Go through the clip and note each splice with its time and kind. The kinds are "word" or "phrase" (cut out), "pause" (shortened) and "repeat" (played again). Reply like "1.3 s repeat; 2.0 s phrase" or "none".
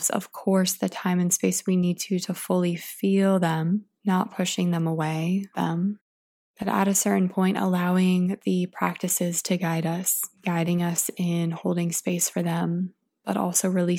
4.0 s pause; 5.5 s phrase; 10.3 s pause